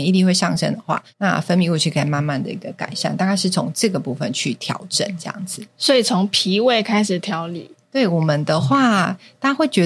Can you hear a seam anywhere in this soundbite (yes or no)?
yes